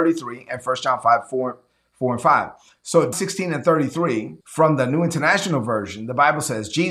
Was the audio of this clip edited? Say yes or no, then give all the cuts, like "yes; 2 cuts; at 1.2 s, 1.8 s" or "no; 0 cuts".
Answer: yes; 2 cuts; at 3.1 s, 4.4 s